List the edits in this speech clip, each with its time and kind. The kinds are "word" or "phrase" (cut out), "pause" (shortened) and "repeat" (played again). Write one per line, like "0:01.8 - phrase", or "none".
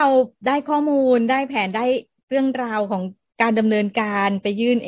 none

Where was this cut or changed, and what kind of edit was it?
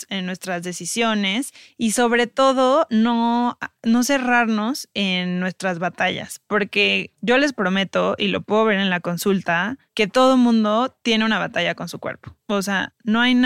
none

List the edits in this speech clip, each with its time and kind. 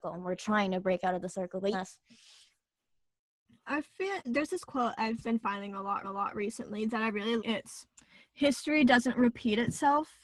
0:01.7 - phrase
0:04.2 - word
0:05.2 - word
0:06.0 - repeat
0:07.4 - word

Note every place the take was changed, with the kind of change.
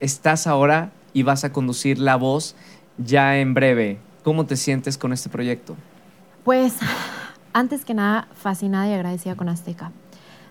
none

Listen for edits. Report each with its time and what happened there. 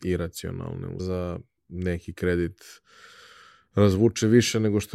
0:01.0 - phrase

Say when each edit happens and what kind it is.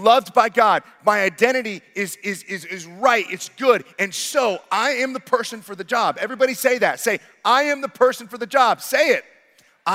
none

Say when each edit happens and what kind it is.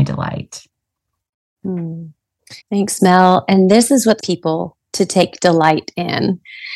0:02.6 - pause
0:04.2 - phrase

